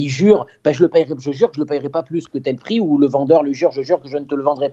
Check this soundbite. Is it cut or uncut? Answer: uncut